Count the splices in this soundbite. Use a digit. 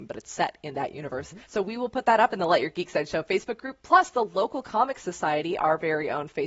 1